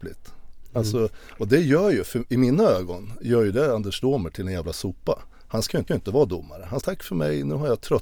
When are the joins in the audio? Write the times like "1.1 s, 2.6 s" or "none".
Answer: 5.9 s, 6.8 s

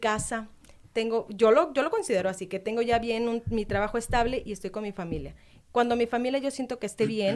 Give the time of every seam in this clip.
none

